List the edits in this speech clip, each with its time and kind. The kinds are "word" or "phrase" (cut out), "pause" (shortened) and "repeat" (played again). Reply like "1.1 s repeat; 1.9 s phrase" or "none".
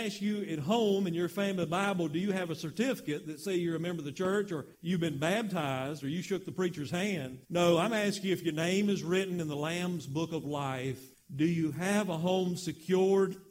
4.7 s pause; 7.4 s pause; 11.1 s pause